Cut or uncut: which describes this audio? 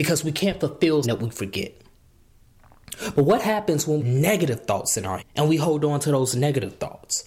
cut